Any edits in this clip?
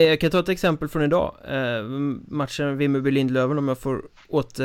no; 0 cuts

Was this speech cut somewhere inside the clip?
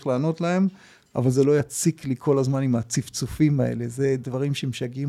no; 0 cuts

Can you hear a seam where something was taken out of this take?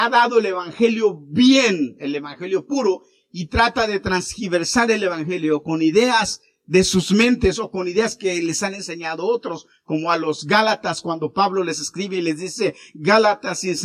no; 0 cuts

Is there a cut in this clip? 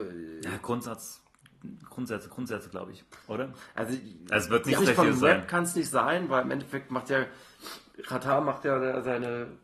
yes; 3 cuts; at 2.3 s, 3.2 s, 4.8 s

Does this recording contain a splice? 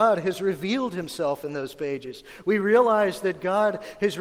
no; 0 cuts

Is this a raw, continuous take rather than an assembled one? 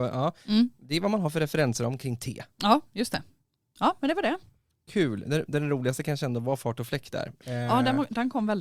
yes; 0 cuts

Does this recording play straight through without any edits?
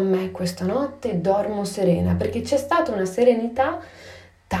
yes; 0 cuts

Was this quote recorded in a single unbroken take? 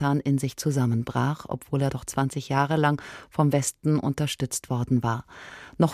yes; 0 cuts

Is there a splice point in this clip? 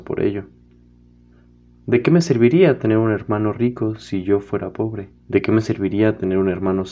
yes; 1 cut; at 5.2 s

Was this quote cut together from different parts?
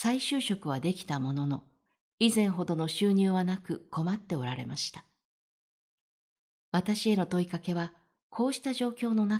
no; 0 cuts

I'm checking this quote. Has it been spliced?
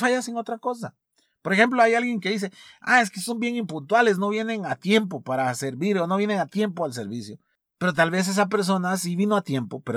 no; 0 cuts

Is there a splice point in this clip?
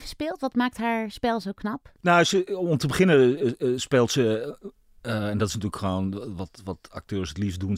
no; 0 cuts

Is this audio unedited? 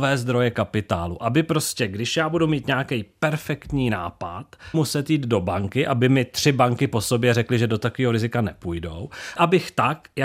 no; 2 cuts; at 4.7 s, 9.4 s

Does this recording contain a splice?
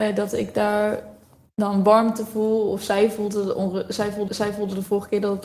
yes; 1 cut; at 4.3 s

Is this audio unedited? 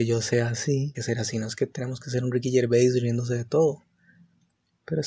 no; 1 cut; at 0.9 s

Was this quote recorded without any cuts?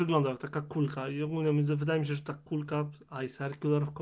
yes; 0 cuts

